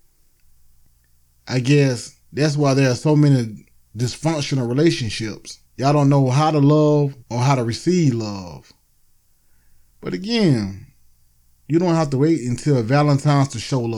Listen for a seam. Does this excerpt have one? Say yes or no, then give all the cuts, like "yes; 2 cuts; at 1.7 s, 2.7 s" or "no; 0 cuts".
yes; 3 cuts; at 2.2 s, 5.7 s, 7.2 s